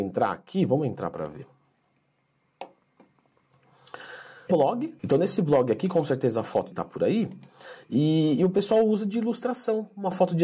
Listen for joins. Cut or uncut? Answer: cut